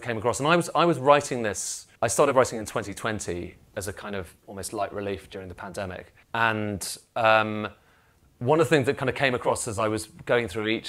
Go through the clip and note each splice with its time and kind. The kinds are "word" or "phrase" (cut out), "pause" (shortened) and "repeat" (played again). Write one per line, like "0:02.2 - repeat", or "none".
0:02.0 - pause
0:04.4 - pause
0:06.2 - pause